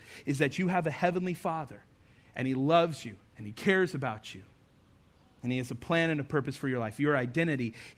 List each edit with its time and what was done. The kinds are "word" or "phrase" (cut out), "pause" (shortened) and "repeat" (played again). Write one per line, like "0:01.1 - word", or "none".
0:03.3 - pause